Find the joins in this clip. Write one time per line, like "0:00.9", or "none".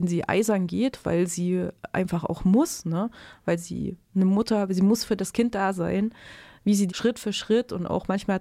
0:06.9

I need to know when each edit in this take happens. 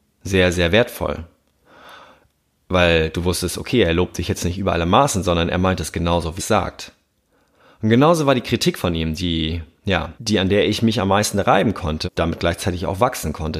0:06.4
0:10.2
0:12.0

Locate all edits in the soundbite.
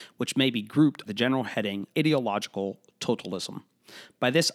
0:01.1
0:01.9

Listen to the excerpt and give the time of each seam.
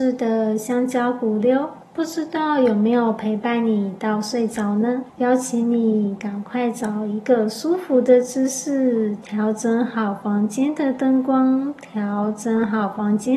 0:01.8
0:05.1

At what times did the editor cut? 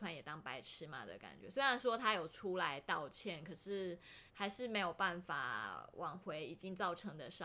0:04.3

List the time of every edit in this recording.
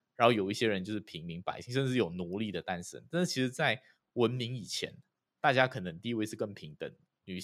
none

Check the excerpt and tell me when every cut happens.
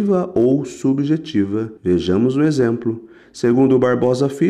0:01.8

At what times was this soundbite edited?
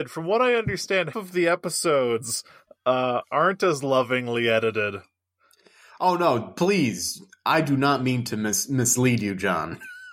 0:01.1
0:03.2

